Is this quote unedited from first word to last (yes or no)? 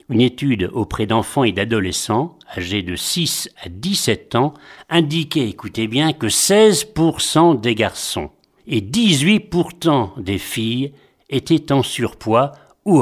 yes